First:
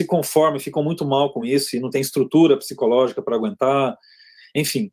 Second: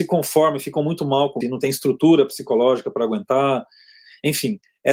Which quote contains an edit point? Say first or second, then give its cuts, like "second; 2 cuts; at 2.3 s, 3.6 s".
second; 1 cut; at 1.4 s